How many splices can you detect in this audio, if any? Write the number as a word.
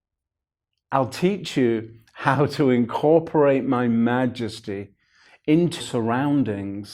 one